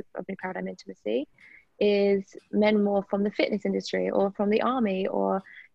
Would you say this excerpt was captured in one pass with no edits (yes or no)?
yes